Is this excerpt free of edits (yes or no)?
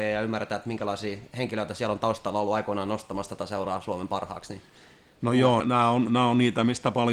no